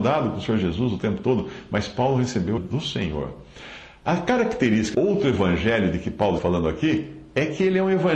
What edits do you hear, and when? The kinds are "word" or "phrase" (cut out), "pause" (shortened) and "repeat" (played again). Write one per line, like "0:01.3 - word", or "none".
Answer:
0:02.6 - word
0:04.9 - word
0:06.4 - word